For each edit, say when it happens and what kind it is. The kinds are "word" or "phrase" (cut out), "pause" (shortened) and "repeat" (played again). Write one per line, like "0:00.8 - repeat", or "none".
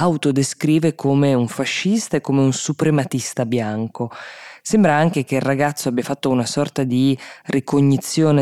none